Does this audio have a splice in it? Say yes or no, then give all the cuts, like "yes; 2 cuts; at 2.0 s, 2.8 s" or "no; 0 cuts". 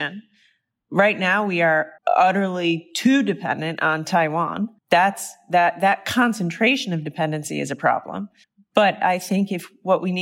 yes; 3 cuts; at 2.0 s, 4.8 s, 8.4 s